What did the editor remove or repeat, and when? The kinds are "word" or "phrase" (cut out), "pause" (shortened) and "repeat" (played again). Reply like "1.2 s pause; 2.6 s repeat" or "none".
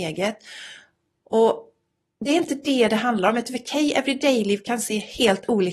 none